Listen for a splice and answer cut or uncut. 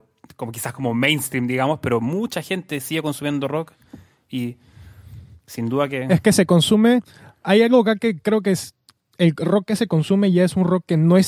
uncut